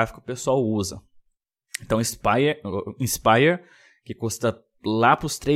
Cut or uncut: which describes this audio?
uncut